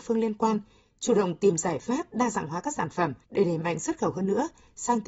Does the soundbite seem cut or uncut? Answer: cut